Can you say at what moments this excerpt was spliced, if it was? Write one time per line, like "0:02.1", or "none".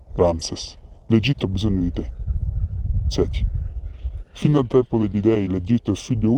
none